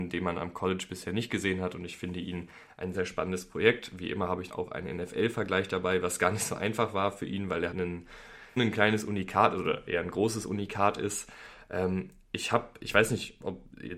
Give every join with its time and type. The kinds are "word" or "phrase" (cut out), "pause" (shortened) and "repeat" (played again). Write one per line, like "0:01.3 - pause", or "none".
0:02.9 - word
0:04.5 - word
0:07.7 - word
0:08.6 - word